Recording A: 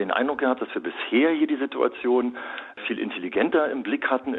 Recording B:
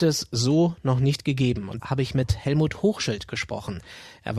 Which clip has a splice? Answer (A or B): B